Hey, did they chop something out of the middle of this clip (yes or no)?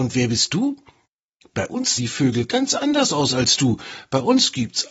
yes